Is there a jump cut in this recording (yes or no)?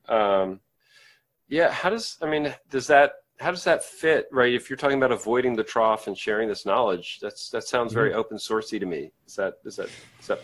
no